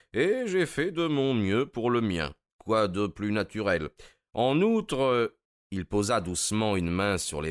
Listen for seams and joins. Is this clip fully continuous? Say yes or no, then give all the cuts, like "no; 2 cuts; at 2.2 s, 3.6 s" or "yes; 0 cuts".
yes; 0 cuts